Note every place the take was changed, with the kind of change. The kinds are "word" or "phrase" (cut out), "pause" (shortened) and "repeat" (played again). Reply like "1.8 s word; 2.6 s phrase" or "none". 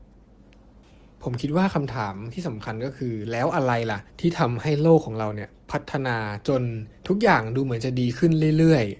4.1 s pause; 7.0 s pause